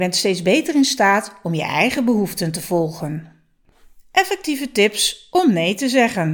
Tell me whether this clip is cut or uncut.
uncut